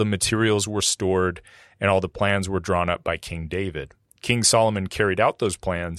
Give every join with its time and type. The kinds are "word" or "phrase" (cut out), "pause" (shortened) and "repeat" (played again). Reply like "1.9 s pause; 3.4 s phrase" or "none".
none